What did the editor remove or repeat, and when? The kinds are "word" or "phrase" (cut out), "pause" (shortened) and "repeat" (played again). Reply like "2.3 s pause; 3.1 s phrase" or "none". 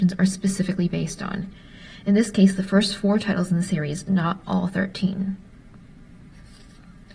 none